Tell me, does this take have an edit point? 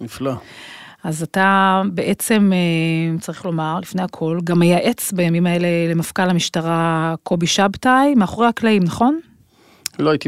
no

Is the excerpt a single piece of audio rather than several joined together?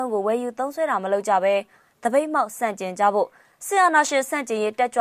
yes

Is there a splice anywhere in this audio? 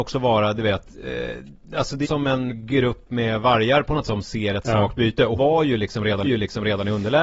yes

